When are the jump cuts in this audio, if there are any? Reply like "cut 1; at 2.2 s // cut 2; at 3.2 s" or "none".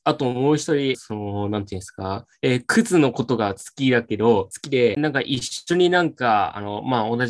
cut 1; at 0.9 s // cut 2; at 5.0 s